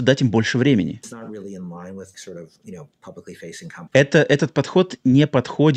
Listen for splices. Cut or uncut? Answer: cut